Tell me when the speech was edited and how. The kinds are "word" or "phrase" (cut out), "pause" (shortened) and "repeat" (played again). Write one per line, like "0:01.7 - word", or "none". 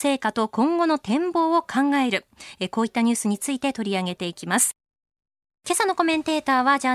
0:05.3 - pause